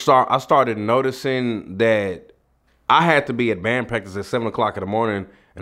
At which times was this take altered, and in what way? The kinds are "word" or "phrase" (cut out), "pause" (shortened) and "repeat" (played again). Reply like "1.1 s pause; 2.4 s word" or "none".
2.6 s pause